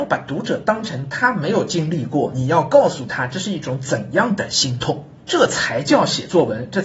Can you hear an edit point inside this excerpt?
yes; 1 cut; at 5.2 s

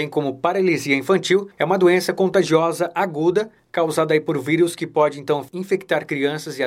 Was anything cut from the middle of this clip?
no; 0 cuts

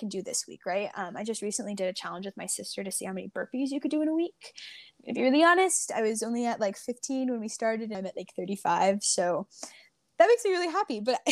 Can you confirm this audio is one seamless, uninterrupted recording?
no; 1 cut; at 7.9 s

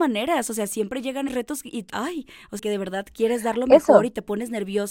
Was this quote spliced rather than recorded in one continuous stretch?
yes; 3 cuts; at 1.3 s, 1.9 s, 2.6 s

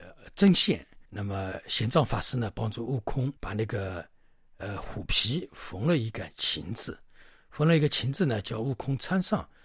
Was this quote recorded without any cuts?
no; 2 cuts; at 1.1 s, 3.4 s

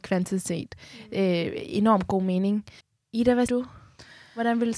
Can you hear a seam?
yes; 2 cuts; at 2.8 s, 3.5 s

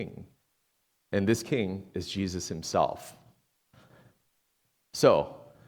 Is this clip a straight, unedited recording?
yes; 0 cuts

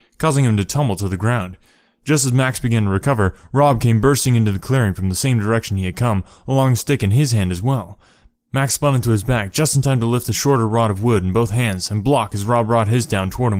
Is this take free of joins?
yes; 0 cuts

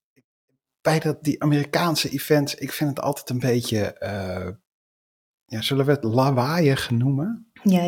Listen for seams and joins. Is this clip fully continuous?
yes; 0 cuts

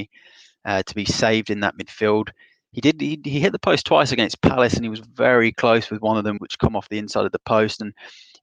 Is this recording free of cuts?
no; 1 cut; at 6.4 s

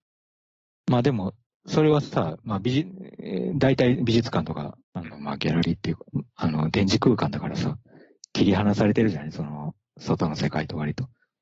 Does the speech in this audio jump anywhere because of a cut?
yes; 1 cut; at 4.8 s

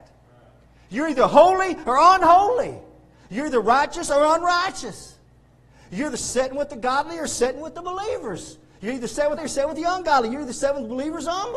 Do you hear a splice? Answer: yes; 1 cut; at 9.4 s

